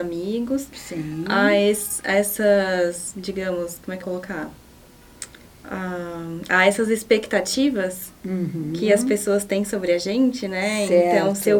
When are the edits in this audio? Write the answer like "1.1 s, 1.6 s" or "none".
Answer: 4.0 s